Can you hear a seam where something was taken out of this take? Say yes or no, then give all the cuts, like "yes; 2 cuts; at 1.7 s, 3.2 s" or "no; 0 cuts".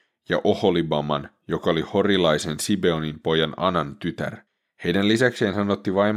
yes; 1 cut; at 4.5 s